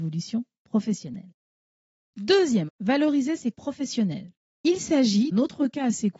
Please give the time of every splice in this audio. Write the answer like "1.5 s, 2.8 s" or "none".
2.7 s, 3.5 s, 5.3 s